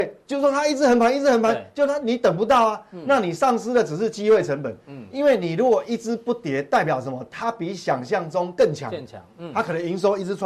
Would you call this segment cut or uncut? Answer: uncut